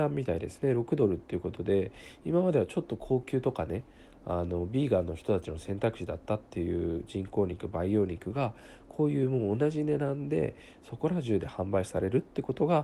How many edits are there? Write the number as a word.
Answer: zero